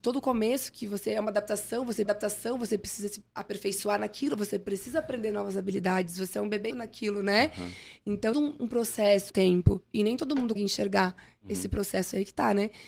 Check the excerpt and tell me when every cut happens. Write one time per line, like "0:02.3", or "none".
0:02.0
0:03.3
0:06.7
0:08.3
0:09.3
0:10.6